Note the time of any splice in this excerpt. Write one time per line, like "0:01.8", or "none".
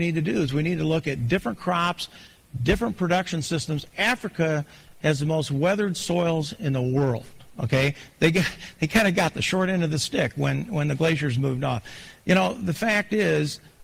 none

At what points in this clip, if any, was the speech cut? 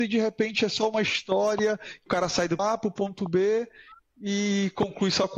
0:02.1
0:02.6
0:04.1

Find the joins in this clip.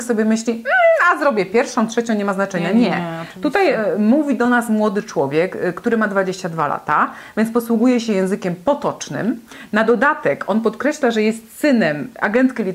none

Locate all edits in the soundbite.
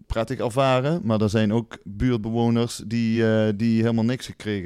none

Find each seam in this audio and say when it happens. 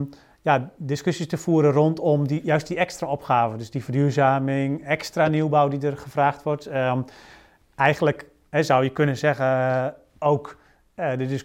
none

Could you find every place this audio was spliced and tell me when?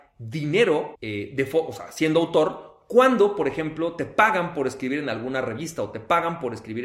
none

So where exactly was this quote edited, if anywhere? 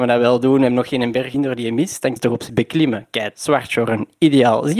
0:01.3
0:02.2
0:02.5
0:03.3

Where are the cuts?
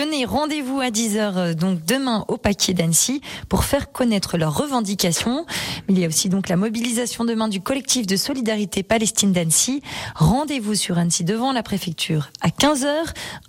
none

